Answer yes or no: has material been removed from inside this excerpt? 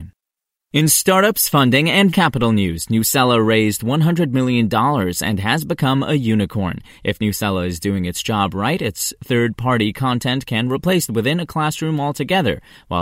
yes